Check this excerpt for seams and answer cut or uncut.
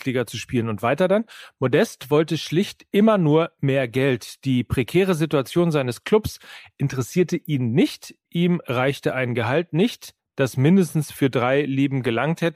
uncut